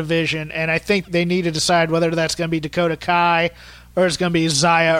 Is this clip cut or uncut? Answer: cut